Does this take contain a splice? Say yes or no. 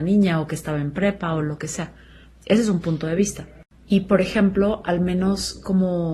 no